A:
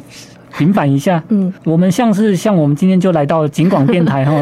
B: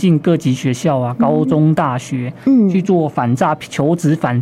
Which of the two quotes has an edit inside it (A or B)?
A